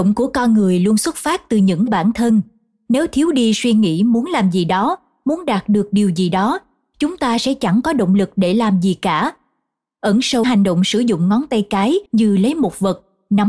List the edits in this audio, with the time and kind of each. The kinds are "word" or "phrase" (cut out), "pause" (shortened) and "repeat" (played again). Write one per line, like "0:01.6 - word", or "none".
0:01.9 - phrase
0:10.4 - word
0:12.1 - pause